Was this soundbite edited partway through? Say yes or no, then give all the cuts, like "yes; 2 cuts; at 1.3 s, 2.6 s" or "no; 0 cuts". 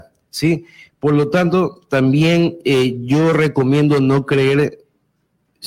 no; 0 cuts